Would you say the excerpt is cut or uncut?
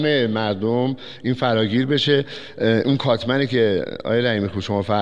uncut